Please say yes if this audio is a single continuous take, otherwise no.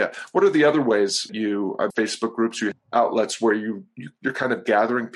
no